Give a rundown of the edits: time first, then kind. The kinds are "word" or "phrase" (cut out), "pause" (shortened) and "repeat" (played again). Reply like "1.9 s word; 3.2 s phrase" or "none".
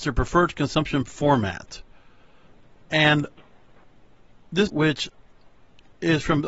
4.7 s word